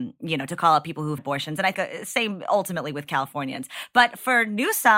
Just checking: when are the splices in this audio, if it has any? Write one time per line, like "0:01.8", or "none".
0:01.2
0:01.7